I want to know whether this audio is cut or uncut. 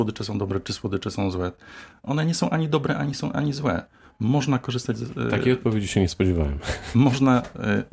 uncut